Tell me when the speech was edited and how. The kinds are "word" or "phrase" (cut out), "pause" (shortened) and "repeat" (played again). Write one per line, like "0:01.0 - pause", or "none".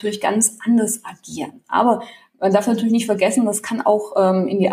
none